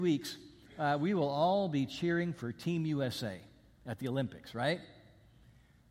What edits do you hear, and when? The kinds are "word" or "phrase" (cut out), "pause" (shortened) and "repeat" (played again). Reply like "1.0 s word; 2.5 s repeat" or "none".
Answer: none